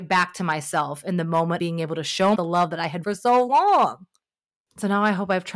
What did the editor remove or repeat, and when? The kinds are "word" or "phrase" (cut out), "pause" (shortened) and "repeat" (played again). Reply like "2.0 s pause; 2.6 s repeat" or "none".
1.6 s word; 2.3 s word; 3.0 s word